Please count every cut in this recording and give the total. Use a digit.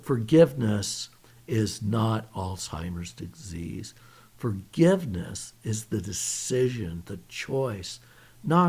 0